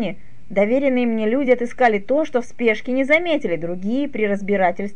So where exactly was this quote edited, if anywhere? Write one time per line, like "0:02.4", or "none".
none